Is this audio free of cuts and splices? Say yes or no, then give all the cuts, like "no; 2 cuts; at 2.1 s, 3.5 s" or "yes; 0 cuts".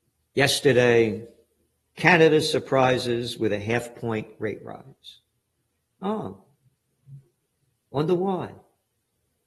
yes; 0 cuts